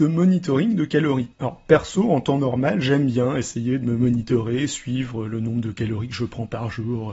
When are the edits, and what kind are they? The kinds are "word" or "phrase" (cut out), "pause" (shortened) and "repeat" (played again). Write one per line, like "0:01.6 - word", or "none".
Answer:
0:01.3 - pause